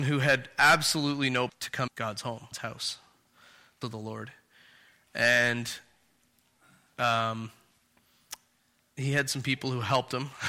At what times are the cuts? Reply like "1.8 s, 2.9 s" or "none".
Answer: 1.5 s, 1.9 s, 2.5 s, 3.8 s